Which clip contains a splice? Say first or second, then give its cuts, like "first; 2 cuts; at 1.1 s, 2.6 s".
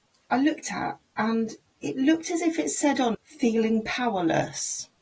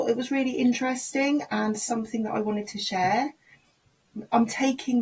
first; 2 cuts; at 1.7 s, 3.1 s